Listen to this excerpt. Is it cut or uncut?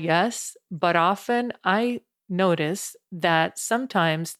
uncut